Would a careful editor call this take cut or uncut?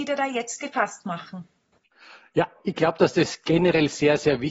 uncut